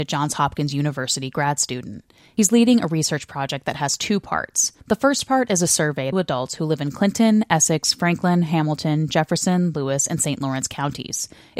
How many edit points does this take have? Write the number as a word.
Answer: two